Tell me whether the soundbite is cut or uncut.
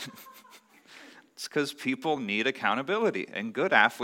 uncut